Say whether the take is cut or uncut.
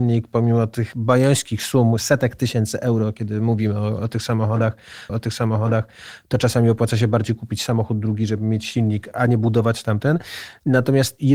cut